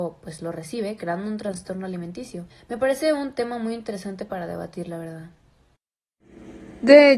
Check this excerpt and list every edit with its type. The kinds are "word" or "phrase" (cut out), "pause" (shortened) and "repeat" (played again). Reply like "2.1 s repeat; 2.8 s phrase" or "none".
2.5 s pause